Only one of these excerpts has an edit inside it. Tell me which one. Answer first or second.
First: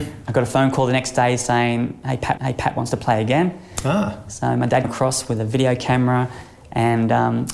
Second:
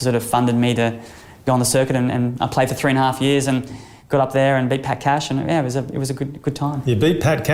first